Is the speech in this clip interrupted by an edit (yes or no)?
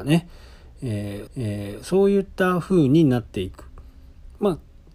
yes